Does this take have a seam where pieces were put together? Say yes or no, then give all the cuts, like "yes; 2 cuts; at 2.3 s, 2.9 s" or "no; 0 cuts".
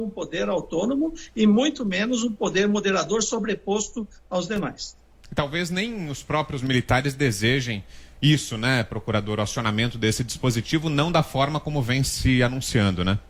no; 0 cuts